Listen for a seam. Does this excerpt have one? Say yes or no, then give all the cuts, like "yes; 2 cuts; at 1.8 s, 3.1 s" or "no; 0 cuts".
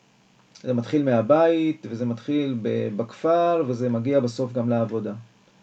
no; 0 cuts